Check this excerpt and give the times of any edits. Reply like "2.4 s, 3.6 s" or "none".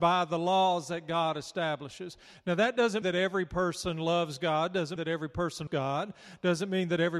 3.0 s, 5.0 s, 5.7 s